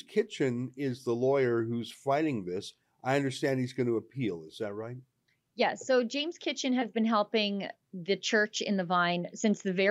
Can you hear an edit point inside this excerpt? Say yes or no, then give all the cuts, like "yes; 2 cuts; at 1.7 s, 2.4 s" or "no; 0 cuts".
no; 0 cuts